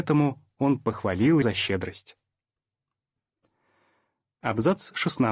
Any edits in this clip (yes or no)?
yes